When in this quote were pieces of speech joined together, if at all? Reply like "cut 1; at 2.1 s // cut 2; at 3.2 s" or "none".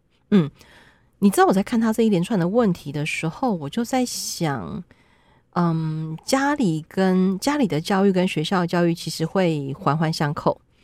none

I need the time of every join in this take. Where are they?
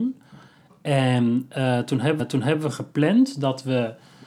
cut 1; at 2.2 s

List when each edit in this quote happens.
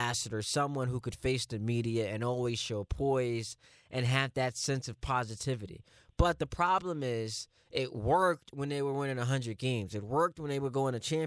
none

